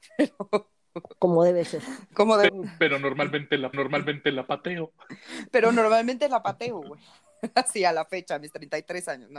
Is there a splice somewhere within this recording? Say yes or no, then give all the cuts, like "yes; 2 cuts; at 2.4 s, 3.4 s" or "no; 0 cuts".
yes; 3 cuts; at 1.2 s, 2.5 s, 3.7 s